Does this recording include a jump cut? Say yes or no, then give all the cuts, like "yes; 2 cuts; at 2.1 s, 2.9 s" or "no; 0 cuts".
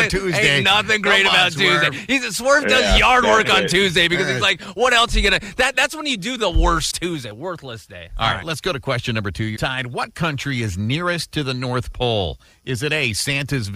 yes; 2 cuts; at 6.9 s, 9.6 s